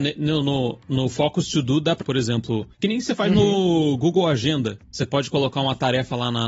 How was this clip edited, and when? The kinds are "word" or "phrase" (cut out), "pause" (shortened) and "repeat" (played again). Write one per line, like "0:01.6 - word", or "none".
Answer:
0:02.0 - phrase
0:02.7 - pause